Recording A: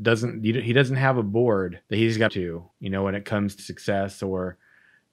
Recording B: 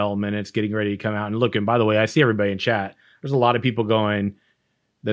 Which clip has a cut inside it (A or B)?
A